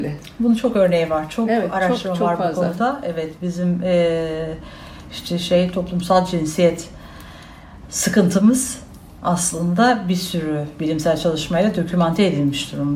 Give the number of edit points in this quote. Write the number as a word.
zero